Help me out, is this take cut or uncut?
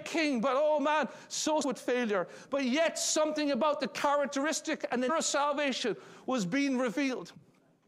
cut